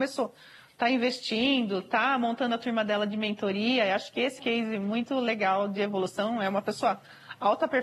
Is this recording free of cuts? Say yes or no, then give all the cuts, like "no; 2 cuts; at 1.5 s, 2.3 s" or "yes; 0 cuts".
no; 1 cut; at 4.4 s